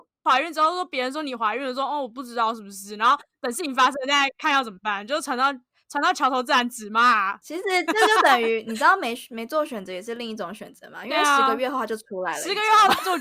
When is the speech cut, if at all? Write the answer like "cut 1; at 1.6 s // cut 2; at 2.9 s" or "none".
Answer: none